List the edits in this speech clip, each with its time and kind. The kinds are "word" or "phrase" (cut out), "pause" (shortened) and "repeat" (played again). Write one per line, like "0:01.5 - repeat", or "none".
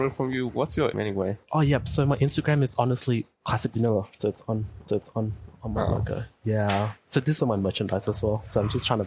0:00.9 - word
0:04.9 - repeat
0:07.4 - word